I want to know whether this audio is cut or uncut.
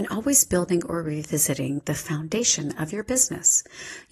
uncut